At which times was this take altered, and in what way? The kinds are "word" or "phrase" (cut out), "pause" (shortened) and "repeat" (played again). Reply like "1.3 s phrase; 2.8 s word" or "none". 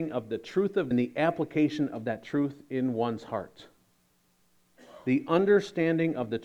0.9 s phrase

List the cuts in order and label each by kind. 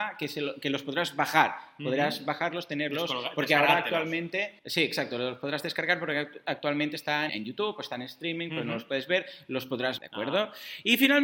4.6 s pause; 7.3 s word; 10.0 s word

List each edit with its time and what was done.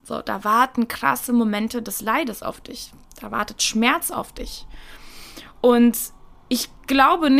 none

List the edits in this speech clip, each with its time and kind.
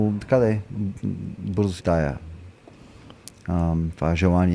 1.8 s word

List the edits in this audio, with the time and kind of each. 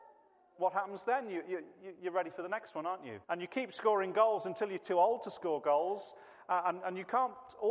3.2 s pause

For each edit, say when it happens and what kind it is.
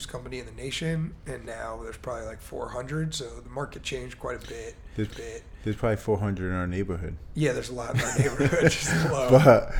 5.1 s repeat

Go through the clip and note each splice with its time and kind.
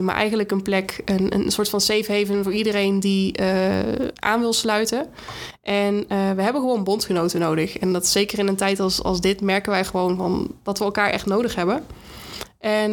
none

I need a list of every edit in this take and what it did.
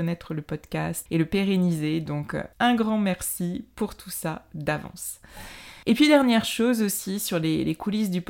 1.1 s word; 2.5 s pause; 5.8 s pause

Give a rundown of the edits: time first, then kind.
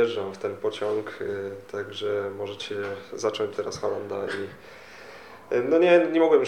3.5 s word

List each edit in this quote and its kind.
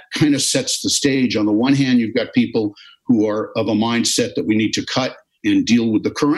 none

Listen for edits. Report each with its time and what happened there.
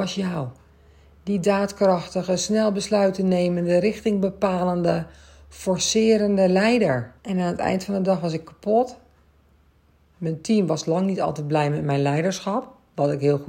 7.2 s pause

